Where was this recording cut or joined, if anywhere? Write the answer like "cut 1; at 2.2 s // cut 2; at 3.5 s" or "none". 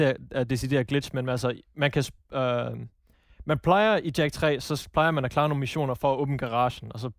none